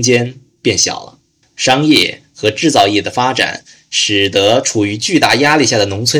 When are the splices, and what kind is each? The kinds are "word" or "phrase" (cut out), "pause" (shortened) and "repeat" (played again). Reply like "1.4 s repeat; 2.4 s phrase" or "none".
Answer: 1.4 s pause